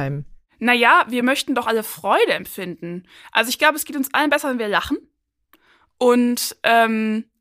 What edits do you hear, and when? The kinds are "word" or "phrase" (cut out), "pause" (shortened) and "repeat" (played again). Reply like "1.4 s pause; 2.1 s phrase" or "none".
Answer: none